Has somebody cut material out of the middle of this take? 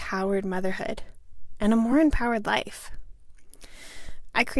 no; 0 cuts

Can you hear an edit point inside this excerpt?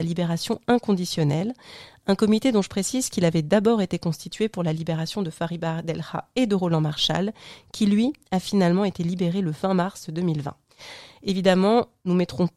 no; 0 cuts

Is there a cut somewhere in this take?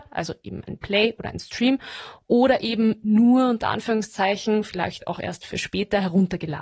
no; 0 cuts

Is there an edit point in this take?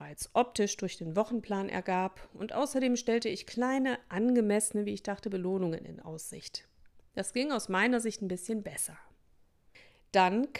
no; 0 cuts

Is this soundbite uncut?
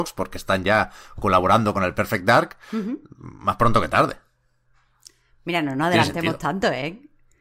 yes; 0 cuts

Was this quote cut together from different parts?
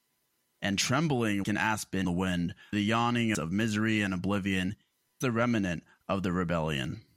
yes; 5 cuts; at 1.4 s, 2.0 s, 2.7 s, 3.3 s, 5.2 s

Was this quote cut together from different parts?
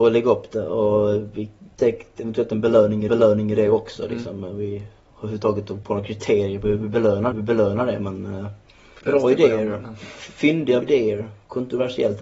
yes; 6 cuts; at 1.8 s, 3.1 s, 5.8 s, 7.3 s, 9.0 s, 10.8 s

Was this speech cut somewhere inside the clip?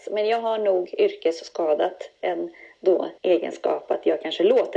yes; 1 cut; at 3.2 s

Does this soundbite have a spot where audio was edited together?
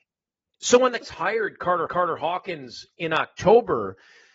yes; 2 cuts; at 1.0 s, 1.9 s

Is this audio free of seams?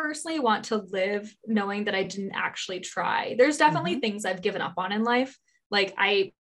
yes; 0 cuts

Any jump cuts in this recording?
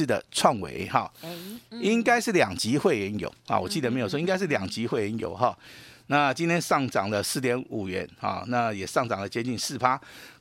no; 0 cuts

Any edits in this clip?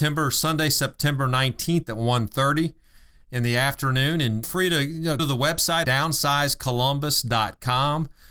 yes; 3 cuts; at 4.4 s, 5.2 s, 5.8 s

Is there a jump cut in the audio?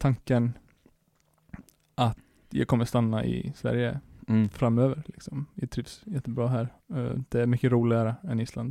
no; 0 cuts

